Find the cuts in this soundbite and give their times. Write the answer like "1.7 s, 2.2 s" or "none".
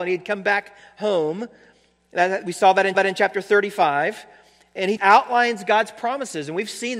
2.9 s, 5.0 s